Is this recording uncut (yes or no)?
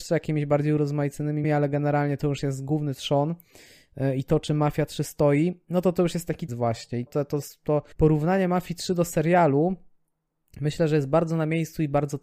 no